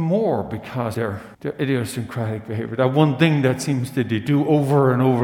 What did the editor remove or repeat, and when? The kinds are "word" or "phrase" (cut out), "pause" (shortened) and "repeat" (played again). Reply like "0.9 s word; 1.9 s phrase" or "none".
0.9 s word; 1.3 s pause